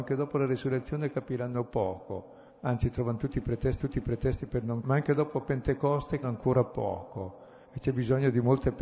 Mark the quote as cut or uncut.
cut